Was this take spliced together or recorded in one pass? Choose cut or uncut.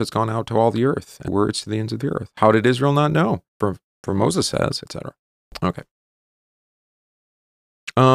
cut